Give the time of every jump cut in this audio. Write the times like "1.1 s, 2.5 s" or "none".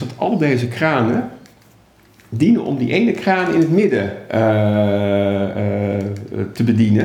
none